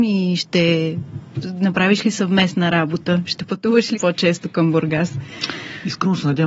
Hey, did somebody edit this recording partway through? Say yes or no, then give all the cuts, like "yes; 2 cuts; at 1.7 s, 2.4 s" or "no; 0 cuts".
yes; 1 cut; at 4.0 s